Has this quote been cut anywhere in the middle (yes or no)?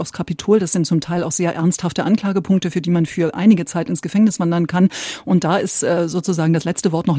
no